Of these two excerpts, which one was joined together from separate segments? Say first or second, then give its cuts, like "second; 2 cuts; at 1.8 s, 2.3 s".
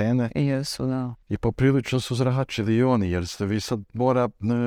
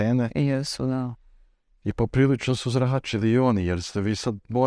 first; 1 cut; at 1.2 s